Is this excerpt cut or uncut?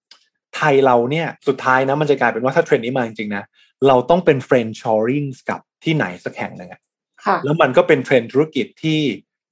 cut